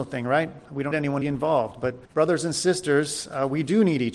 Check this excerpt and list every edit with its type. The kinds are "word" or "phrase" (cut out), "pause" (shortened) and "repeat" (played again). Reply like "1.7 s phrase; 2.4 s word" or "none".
0.9 s word; 1.2 s phrase; 2.1 s pause